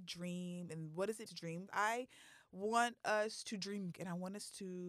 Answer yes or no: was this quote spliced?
yes